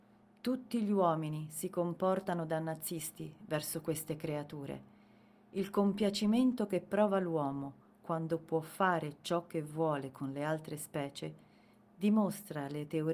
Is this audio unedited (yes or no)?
yes